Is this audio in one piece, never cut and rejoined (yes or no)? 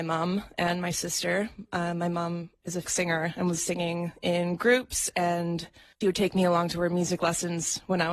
no